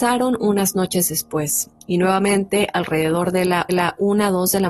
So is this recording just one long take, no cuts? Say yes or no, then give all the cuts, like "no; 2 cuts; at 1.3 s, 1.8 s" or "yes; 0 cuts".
no; 1 cut; at 3.7 s